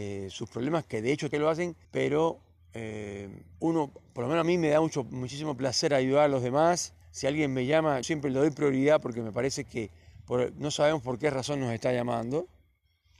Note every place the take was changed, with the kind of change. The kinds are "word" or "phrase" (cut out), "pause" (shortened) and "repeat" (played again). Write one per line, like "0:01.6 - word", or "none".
0:01.3 - phrase
0:01.8 - pause
0:03.5 - pause
0:07.0 - pause
0:08.0 - word